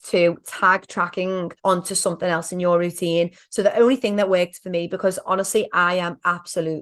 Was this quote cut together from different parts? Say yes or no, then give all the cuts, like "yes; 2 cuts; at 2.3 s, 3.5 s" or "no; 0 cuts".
yes; 1 cut; at 1.6 s